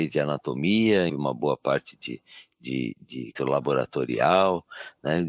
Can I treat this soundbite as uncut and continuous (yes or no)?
no